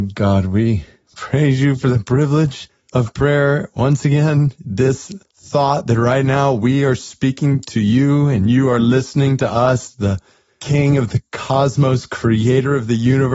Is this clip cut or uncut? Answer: uncut